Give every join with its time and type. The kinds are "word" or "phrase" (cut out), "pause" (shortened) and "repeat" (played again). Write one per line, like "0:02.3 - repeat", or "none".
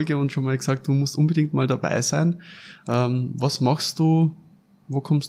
none